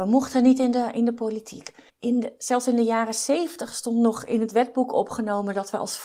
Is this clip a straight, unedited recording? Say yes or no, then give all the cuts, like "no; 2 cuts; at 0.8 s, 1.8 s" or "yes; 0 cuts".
no; 1 cut; at 1.9 s